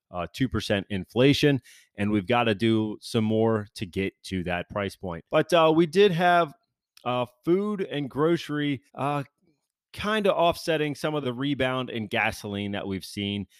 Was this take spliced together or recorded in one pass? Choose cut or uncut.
cut